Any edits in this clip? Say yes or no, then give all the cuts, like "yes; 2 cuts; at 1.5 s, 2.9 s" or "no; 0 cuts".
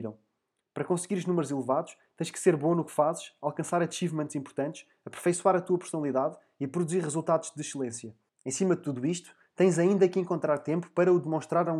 yes; 1 cut; at 8.3 s